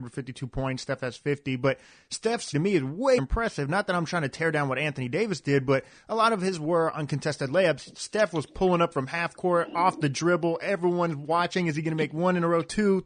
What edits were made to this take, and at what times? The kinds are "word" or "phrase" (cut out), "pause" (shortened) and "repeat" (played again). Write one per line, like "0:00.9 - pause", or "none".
0:02.5 - word
0:03.2 - word